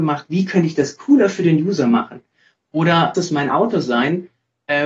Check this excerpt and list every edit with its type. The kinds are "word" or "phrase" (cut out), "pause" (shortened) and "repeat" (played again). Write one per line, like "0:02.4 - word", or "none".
0:03.1 - word